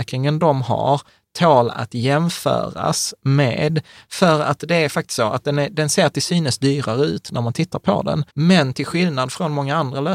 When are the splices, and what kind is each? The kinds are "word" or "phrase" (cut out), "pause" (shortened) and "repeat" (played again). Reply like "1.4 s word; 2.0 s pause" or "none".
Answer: 8.3 s pause